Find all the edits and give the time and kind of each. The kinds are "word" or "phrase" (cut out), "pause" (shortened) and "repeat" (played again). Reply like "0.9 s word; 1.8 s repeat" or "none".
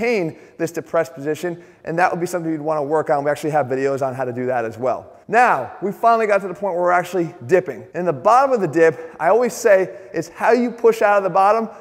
5.2 s pause; 7.9 s pause